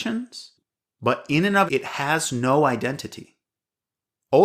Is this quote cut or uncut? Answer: cut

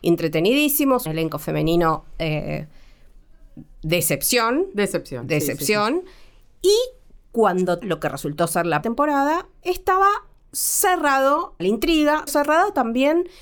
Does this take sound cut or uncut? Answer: cut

